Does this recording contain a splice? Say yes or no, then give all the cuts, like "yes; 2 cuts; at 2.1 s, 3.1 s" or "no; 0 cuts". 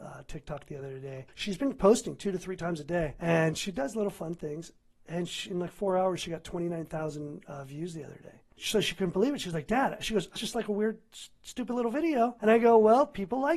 yes; 2 cuts; at 1.3 s, 10.4 s